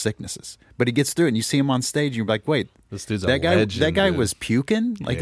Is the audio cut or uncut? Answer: uncut